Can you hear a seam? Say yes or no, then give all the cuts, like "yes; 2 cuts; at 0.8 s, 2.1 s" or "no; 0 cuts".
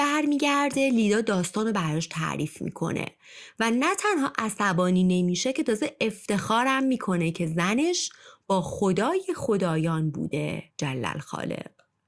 yes; 1 cut; at 10.7 s